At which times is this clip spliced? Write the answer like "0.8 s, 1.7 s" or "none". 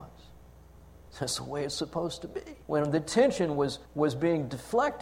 2.6 s, 3.8 s